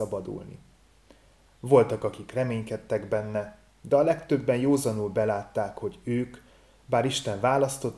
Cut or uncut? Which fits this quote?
uncut